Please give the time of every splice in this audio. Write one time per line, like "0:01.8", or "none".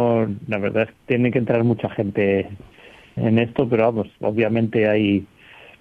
0:00.9
0:03.2